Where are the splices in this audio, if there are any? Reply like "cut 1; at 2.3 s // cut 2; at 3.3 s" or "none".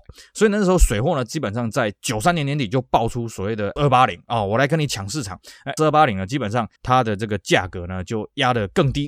cut 1; at 3.8 s // cut 2; at 5.8 s // cut 3; at 6.8 s